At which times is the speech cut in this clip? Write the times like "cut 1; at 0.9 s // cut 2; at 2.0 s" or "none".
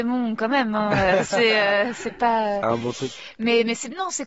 none